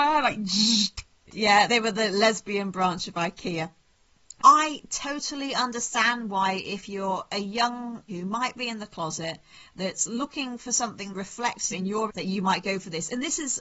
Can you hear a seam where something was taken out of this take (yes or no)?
yes